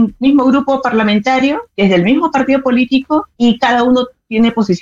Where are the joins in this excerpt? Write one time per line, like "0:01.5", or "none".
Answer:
0:01.7
0:03.3